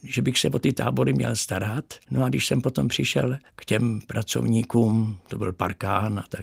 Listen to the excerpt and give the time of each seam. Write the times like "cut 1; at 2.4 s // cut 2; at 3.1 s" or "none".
cut 1; at 2.0 s // cut 2; at 3.5 s